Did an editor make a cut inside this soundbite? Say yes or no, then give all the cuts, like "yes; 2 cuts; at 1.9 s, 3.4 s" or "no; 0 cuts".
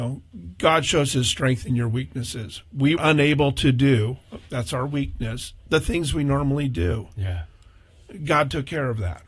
yes; 1 cut; at 3.0 s